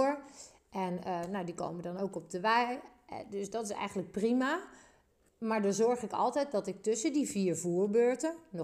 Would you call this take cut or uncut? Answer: uncut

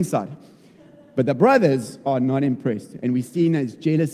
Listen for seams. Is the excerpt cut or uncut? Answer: uncut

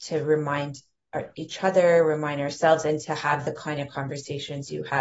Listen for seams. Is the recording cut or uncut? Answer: uncut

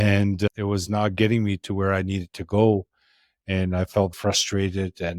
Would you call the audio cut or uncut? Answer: cut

